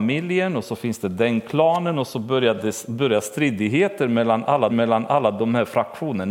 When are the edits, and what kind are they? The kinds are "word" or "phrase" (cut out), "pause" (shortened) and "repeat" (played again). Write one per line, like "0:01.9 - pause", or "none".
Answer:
0:04.7 - repeat